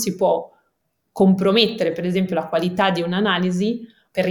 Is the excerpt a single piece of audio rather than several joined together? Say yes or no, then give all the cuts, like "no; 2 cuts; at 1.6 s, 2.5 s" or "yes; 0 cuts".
yes; 0 cuts